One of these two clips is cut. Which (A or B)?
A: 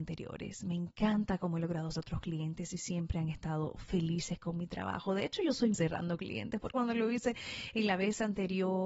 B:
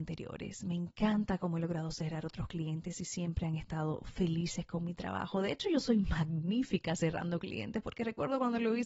A